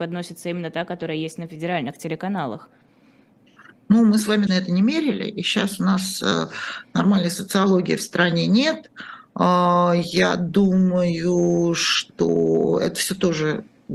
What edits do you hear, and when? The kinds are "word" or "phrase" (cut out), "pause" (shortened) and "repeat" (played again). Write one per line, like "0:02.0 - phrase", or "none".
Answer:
0:04.5 - word